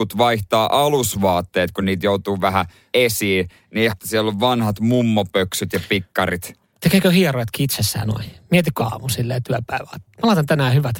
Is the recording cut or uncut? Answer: cut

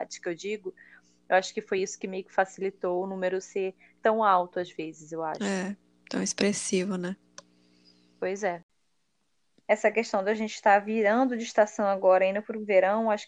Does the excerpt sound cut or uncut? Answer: uncut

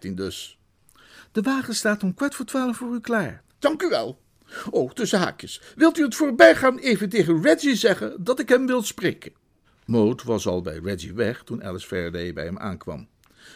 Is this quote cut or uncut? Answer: cut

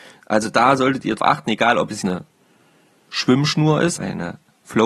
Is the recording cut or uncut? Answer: cut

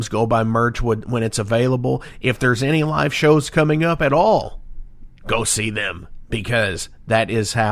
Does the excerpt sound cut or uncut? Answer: cut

